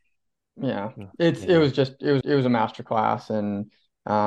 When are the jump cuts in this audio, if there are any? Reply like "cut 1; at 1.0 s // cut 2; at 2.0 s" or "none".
cut 1; at 2.2 s